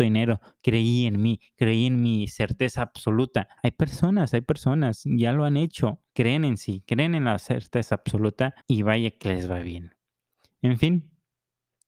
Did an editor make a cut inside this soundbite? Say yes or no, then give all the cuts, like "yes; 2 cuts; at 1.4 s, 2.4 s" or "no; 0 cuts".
yes; 3 cuts; at 3.6 s, 6.1 s, 8.6 s